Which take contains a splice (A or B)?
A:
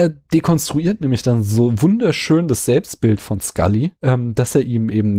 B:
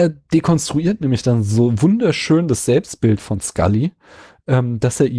A